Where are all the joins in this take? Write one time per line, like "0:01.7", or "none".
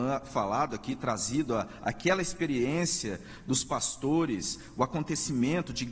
none